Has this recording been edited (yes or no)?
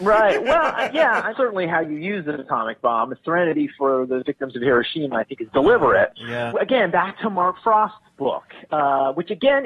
no